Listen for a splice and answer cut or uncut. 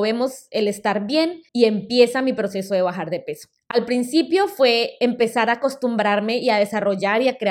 cut